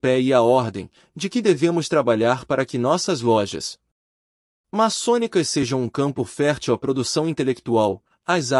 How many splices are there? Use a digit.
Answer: 0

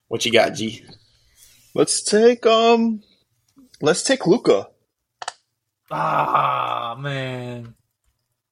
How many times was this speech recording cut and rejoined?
0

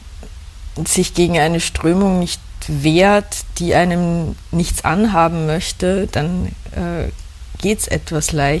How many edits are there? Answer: 0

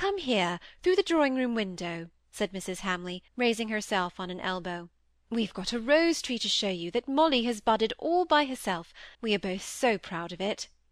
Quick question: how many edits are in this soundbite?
4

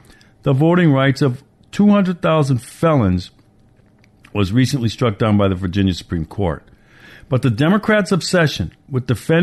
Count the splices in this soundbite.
0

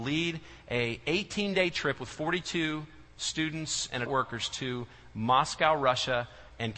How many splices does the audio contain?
1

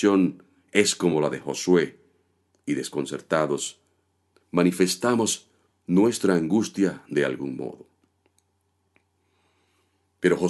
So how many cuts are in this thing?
0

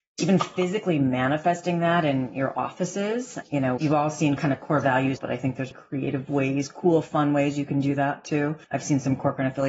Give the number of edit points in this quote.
4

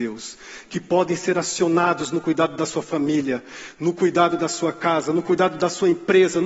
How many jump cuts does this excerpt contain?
0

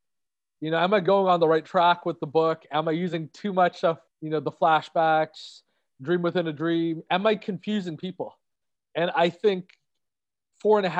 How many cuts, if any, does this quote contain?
1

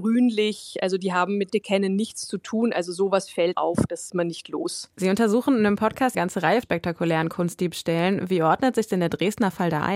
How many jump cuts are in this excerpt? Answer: 6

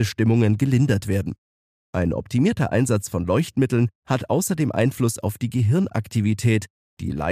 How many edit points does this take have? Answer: 0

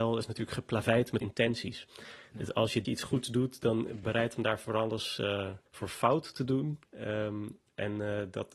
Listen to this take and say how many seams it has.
5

